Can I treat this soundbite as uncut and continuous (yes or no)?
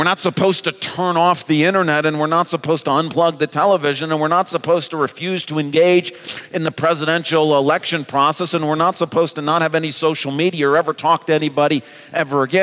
yes